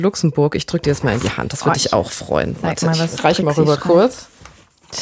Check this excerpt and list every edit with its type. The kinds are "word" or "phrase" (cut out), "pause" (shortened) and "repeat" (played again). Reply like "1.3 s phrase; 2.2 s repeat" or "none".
none